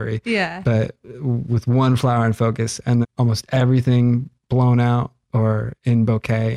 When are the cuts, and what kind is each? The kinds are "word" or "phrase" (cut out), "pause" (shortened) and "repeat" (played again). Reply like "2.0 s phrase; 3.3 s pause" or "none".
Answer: 3.0 s word